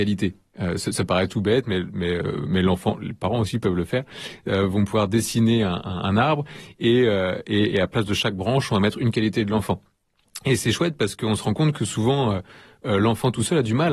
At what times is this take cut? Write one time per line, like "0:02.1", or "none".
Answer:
none